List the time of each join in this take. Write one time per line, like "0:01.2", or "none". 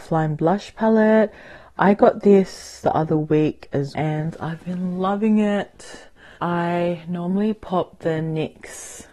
0:03.9
0:06.4